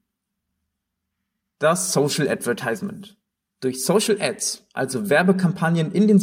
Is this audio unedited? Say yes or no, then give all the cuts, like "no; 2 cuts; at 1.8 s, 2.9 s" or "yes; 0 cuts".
no; 1 cut; at 3.3 s